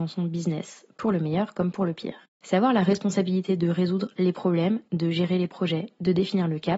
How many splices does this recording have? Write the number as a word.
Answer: one